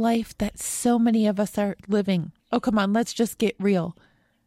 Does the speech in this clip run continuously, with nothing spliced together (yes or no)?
no